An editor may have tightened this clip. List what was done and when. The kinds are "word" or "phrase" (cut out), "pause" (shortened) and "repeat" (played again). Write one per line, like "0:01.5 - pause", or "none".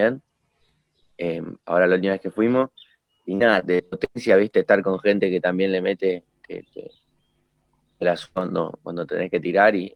none